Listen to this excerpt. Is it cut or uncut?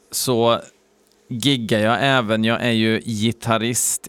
uncut